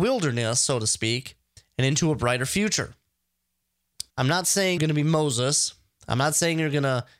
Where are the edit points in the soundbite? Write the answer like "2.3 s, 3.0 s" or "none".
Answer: 4.1 s, 4.8 s